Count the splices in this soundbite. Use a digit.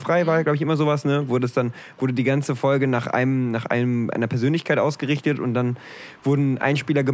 0